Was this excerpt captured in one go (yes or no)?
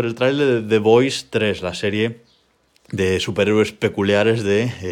yes